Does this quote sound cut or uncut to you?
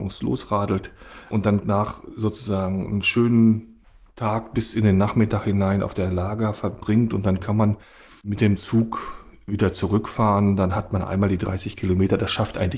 uncut